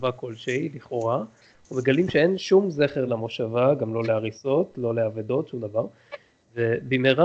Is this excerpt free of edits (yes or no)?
yes